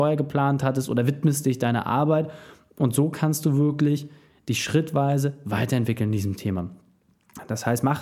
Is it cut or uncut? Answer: uncut